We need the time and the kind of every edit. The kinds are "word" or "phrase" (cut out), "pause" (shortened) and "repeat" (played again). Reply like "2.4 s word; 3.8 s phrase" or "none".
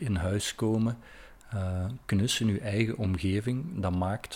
none